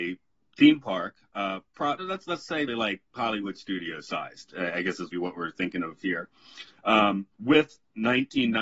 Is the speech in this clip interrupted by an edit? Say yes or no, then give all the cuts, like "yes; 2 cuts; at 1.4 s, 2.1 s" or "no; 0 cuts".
yes; 5 cuts; at 2.0 s, 2.7 s, 3.1 s, 5.1 s, 7.3 s